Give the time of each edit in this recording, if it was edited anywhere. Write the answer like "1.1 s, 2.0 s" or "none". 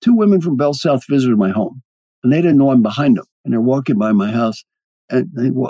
3.3 s